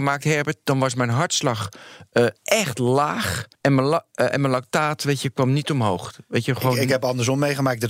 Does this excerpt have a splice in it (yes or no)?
yes